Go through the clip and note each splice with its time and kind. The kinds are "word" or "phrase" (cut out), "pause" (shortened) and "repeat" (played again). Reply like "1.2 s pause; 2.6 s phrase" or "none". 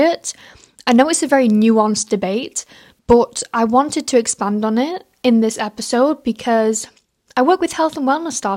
none